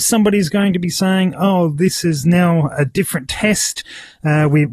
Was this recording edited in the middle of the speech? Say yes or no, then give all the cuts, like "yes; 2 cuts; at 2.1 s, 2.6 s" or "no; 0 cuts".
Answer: no; 0 cuts